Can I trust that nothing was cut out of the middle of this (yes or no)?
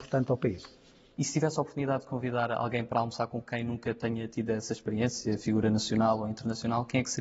yes